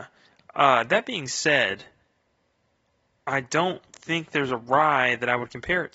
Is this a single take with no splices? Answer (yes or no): yes